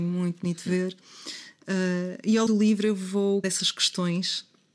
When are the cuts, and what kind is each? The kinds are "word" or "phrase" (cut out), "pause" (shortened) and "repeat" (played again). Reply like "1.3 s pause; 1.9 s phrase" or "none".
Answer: 2.5 s word; 3.4 s word